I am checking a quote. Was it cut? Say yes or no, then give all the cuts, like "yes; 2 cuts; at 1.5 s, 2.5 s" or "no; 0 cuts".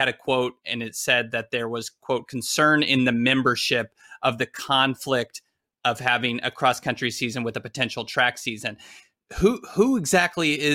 no; 0 cuts